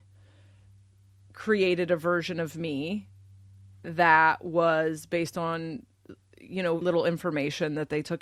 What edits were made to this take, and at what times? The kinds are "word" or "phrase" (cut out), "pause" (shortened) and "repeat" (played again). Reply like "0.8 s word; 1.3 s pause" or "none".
6.8 s word